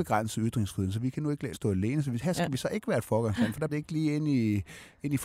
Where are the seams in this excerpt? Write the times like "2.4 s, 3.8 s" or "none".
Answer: 1.5 s, 3.7 s

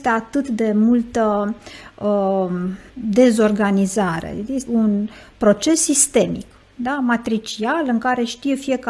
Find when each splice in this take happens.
2.9 s, 4.7 s

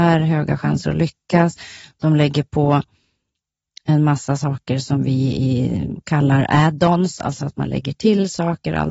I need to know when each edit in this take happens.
none

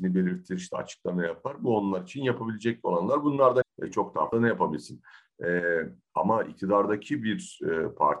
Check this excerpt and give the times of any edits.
3.6 s, 4.3 s

